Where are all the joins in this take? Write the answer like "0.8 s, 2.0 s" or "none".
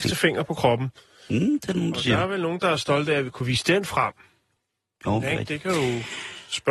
none